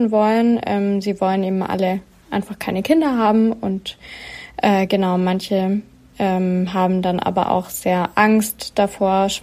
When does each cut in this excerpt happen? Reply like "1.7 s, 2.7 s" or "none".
none